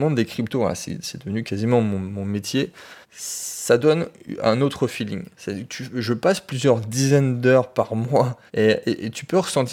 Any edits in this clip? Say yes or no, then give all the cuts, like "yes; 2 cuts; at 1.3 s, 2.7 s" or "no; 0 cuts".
yes; 2 cuts; at 3.0 s, 8.5 s